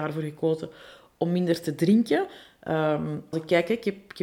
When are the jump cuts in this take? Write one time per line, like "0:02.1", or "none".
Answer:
0:03.3